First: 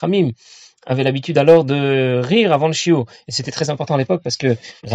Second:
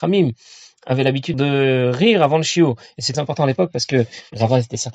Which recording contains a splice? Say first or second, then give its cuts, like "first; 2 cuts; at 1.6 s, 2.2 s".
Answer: second; 2 cuts; at 1.3 s, 3.1 s